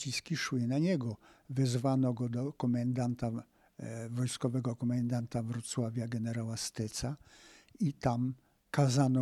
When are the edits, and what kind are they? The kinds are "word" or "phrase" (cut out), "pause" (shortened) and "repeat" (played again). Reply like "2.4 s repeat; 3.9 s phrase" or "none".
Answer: none

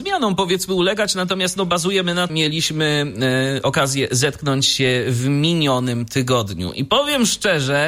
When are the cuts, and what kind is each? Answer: 2.3 s phrase

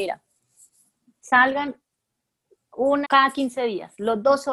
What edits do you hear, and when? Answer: 3.0 s word

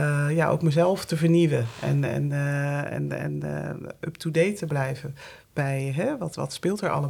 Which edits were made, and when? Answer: none

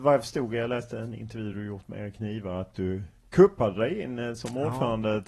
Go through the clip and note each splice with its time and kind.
none

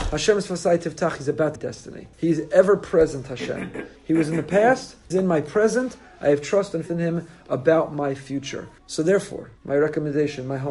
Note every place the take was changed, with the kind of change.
1.6 s phrase; 2.1 s pause; 4.0 s pause; 5.1 s word; 6.9 s word; 8.8 s pause; 9.6 s pause

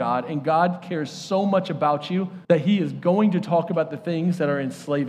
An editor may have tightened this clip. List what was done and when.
2.4 s pause

